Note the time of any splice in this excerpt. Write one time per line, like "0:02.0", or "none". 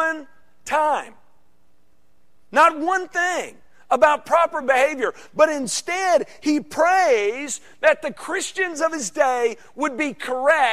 none

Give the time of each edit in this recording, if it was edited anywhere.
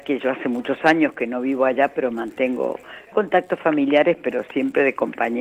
0:03.1

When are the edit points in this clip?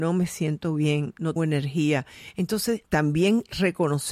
0:01.4
0:02.8

